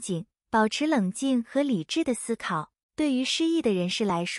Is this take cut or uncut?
cut